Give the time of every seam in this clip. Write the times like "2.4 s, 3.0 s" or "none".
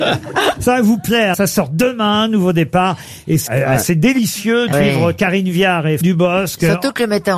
1.3 s, 3.5 s, 4.7 s, 6.0 s